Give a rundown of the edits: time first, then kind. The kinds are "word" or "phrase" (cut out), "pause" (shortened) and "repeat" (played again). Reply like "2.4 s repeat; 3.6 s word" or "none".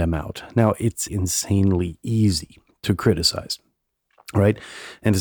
1.1 s word